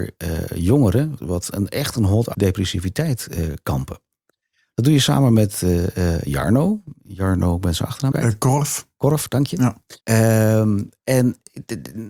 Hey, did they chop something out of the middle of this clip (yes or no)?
yes